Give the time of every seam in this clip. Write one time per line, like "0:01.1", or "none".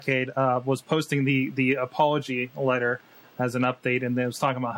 none